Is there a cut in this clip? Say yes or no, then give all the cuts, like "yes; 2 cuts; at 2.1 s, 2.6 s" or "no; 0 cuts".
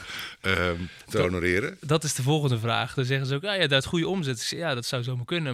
no; 0 cuts